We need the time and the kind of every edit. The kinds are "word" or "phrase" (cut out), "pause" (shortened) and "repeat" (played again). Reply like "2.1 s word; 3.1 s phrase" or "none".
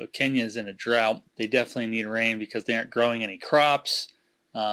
1.3 s pause